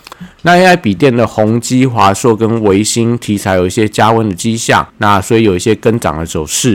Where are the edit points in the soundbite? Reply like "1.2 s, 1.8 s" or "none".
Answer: 4.9 s